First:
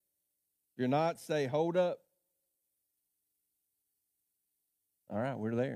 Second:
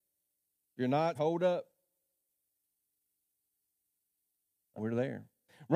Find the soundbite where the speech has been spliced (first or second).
second